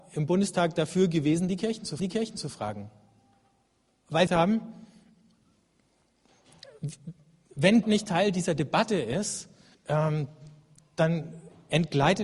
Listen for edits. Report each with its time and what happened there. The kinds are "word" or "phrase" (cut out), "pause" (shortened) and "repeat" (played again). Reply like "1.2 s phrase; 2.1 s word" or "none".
2.0 s repeat; 4.3 s phrase; 7.8 s word; 9.7 s pause